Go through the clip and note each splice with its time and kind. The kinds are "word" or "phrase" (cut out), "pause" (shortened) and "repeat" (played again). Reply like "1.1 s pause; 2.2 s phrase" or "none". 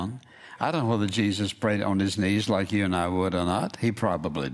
none